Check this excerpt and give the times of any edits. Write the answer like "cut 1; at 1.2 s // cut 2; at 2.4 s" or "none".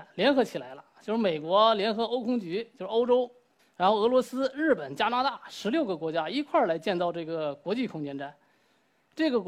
cut 1; at 3.6 s